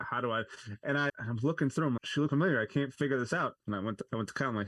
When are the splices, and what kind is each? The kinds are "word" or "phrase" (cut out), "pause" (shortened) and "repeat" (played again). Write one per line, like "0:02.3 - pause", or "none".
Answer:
0:01.1 - word
0:02.0 - word
0:02.3 - word